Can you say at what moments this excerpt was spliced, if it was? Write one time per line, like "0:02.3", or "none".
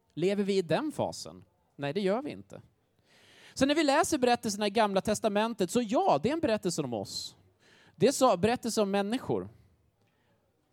none